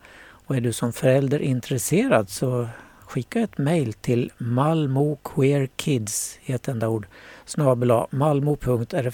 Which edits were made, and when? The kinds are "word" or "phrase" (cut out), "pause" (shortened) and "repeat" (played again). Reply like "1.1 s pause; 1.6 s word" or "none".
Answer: none

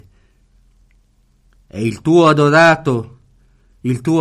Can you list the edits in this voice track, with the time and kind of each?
none

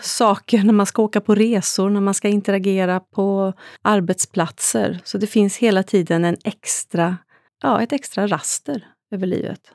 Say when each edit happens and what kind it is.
3.8 s pause; 7.5 s pause

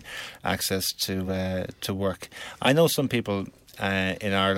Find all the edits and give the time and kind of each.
none

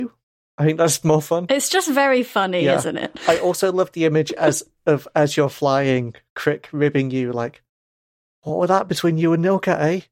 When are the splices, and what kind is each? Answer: none

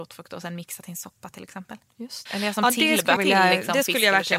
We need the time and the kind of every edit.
2.3 s word; 3.2 s word

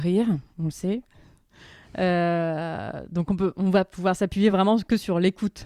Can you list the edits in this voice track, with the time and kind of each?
none

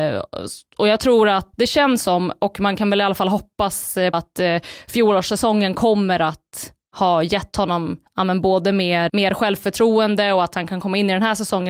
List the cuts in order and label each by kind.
1.5 s word; 4.1 s word; 8.1 s pause; 9.1 s word

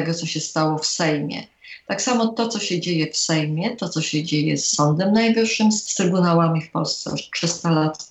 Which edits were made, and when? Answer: none

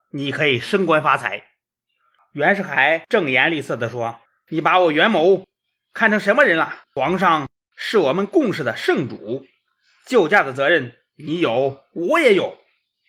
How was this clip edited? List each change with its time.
4.3 s pause; 6.8 s pause

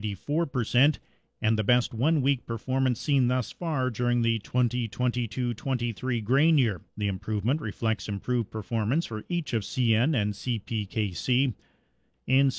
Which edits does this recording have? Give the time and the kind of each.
6.9 s pause

